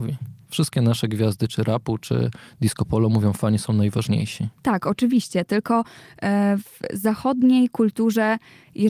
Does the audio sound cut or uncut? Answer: cut